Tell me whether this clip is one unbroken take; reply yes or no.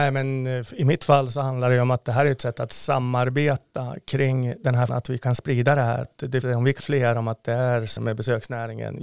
no